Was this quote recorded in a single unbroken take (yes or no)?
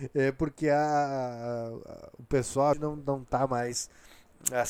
no